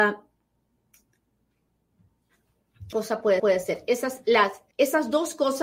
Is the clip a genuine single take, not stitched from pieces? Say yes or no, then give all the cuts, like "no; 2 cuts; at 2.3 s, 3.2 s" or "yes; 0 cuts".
no; 3 cuts; at 2.9 s, 3.4 s, 4.7 s